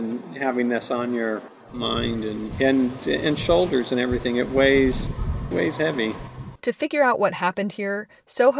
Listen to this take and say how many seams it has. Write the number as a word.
one